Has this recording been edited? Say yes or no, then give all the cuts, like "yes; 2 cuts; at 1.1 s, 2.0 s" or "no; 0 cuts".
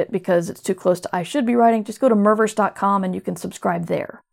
no; 0 cuts